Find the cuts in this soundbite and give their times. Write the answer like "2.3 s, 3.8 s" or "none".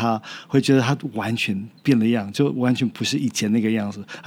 1.8 s

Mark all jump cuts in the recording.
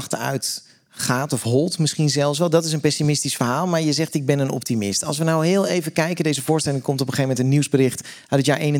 none

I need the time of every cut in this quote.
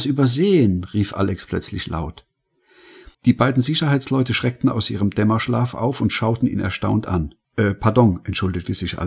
7.4 s

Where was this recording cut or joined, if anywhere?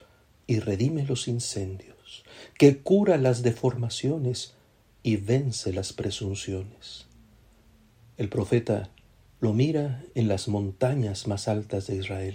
none

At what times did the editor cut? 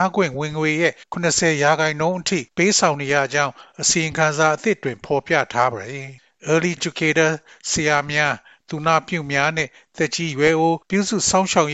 1.0 s, 2.5 s, 6.2 s, 6.8 s, 10.8 s

